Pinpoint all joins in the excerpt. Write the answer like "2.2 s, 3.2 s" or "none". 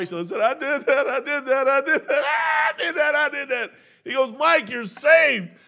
none